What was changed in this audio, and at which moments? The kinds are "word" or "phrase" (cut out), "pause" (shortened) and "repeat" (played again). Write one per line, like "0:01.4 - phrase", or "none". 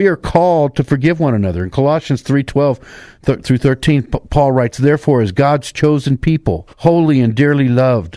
0:06.7 - pause